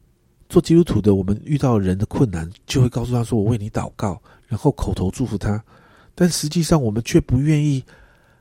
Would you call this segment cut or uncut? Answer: uncut